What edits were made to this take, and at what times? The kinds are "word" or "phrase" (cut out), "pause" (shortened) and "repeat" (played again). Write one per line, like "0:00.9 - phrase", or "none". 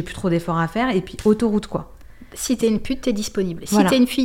none